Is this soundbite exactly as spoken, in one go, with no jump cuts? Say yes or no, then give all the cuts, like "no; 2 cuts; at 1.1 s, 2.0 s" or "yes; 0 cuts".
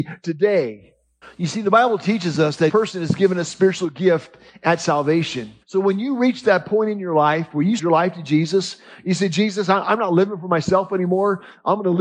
no; 4 cuts; at 1.2 s, 2.7 s, 5.6 s, 7.8 s